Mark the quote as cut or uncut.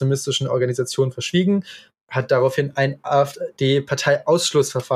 uncut